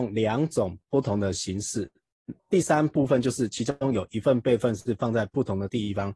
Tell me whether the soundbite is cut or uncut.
cut